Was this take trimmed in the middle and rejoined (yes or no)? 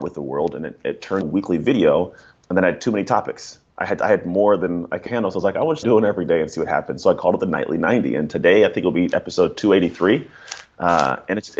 yes